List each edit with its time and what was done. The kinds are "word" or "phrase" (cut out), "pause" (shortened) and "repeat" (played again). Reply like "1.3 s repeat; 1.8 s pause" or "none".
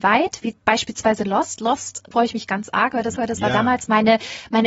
2.1 s word; 3.1 s repeat